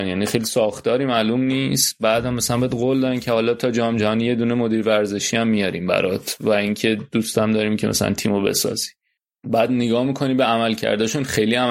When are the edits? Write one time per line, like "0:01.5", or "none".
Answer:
none

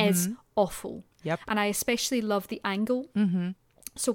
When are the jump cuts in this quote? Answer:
none

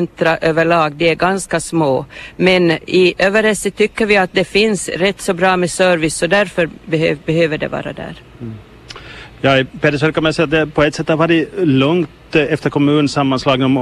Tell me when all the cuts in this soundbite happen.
0:07.2

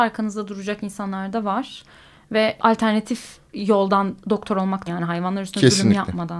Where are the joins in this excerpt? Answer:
0:02.6
0:03.5
0:04.9

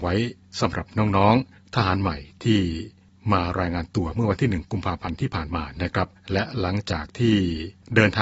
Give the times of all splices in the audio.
0:06.2

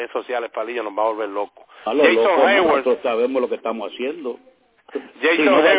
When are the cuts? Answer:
0:01.8

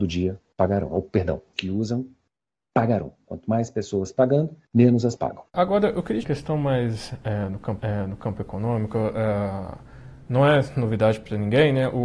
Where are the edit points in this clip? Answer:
0:01.5
0:04.6
0:05.2
0:05.5
0:06.2
0:07.8

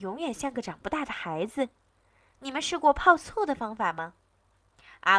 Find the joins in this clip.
none

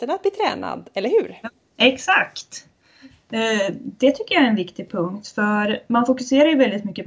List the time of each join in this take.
none

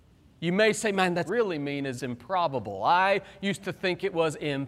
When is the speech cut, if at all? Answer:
0:01.3
0:02.0

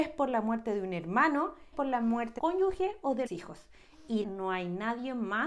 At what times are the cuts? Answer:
0:01.7
0:02.4
0:03.3
0:04.2

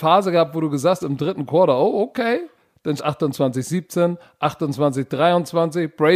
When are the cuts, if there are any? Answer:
0:01.0
0:03.0

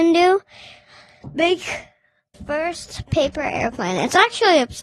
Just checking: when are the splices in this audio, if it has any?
0:02.3

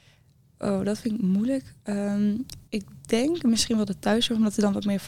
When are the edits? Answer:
0:02.7

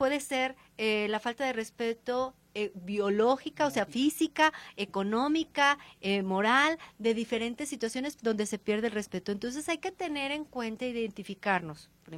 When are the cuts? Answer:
none

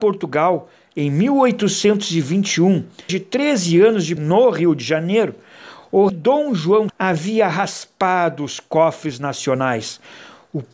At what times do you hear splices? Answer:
0:03.1
0:04.2
0:06.1
0:06.9

